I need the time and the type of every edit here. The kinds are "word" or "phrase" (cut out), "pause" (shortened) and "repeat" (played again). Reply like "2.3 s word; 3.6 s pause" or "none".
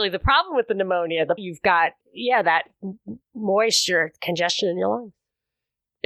1.4 s phrase; 2.0 s pause; 3.2 s pause